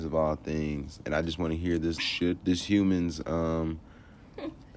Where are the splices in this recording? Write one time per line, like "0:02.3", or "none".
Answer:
0:01.0
0:02.0